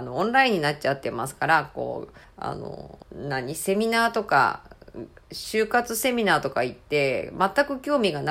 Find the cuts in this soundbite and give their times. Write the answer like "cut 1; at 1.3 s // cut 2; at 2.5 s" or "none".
cut 1; at 2.2 s // cut 2; at 3.0 s